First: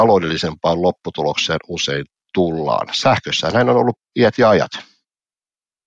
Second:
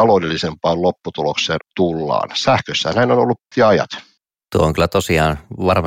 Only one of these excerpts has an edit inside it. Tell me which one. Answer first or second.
second